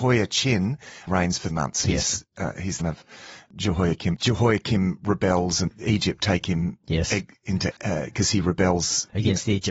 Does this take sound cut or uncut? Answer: cut